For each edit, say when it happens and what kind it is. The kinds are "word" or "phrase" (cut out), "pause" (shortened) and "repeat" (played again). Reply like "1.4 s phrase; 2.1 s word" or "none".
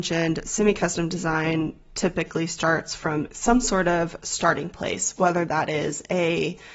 none